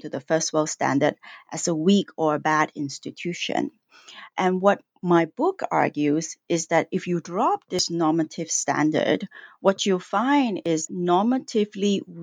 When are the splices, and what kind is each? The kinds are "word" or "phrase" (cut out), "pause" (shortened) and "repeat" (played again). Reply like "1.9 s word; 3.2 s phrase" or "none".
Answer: 10.9 s word